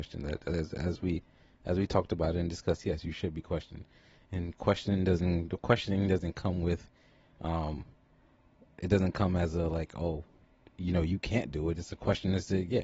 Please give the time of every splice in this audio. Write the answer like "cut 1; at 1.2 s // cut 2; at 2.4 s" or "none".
none